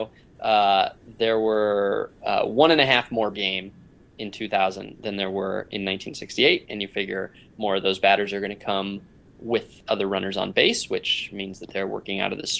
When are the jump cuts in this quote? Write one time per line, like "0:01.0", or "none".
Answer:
0:03.3